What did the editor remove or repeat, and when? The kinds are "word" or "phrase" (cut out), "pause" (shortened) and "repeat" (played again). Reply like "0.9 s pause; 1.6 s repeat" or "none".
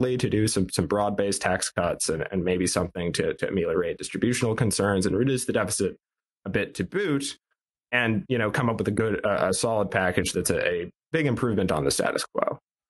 none